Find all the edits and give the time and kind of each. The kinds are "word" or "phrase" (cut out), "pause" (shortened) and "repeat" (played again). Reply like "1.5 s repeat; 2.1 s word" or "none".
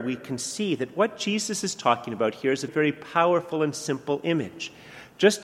2.7 s word